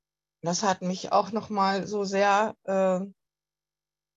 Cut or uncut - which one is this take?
uncut